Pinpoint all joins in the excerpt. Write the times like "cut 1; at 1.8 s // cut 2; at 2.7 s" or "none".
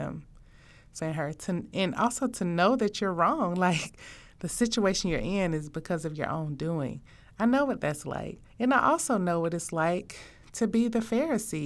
cut 1; at 1.0 s // cut 2; at 8.5 s